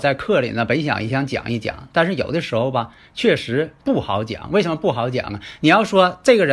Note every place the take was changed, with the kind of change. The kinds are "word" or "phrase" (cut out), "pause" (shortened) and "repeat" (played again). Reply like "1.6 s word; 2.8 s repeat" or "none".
none

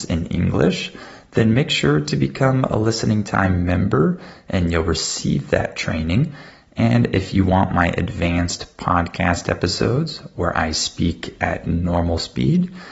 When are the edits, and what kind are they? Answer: none

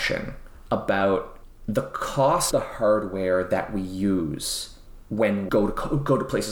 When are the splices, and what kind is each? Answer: 2.5 s word; 5.5 s word

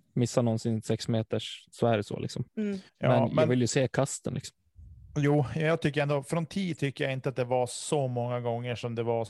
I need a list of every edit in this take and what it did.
2.5 s pause; 2.9 s pause

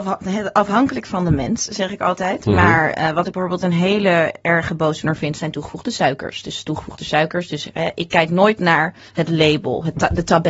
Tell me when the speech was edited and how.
9.1 s pause

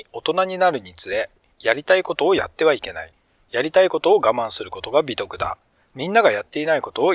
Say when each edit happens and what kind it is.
none

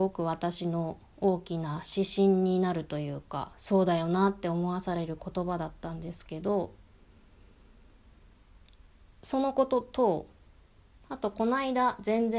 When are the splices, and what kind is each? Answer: none

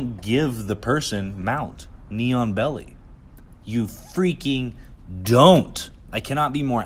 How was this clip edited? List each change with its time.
none

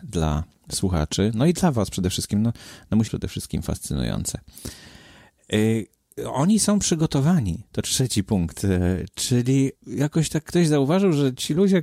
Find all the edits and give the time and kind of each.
3.1 s phrase; 9.8 s pause

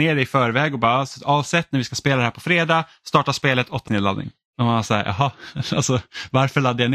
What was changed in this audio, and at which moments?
3.9 s word

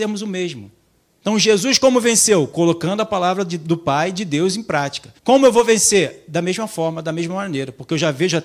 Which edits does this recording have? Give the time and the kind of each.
1.0 s pause; 5.2 s pause

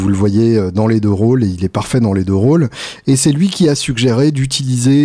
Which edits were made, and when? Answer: none

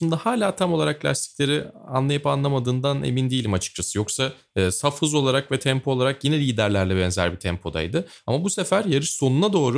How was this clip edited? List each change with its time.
none

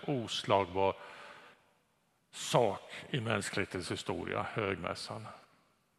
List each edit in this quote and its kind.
none

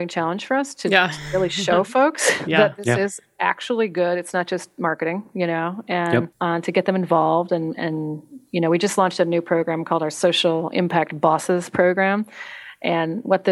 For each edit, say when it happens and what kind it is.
6.3 s pause

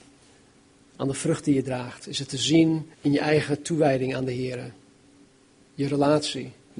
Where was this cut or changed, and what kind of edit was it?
2.9 s pause

